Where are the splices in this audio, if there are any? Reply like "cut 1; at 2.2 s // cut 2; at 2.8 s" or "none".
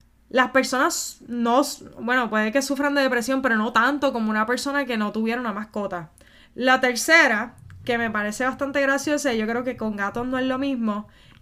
none